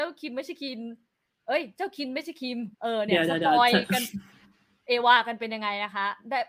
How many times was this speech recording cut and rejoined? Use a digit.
1